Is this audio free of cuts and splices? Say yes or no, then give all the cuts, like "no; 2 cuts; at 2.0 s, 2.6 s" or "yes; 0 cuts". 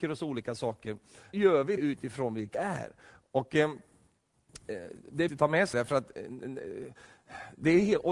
no; 5 cuts; at 1.3 s, 1.8 s, 2.5 s, 5.3 s, 5.7 s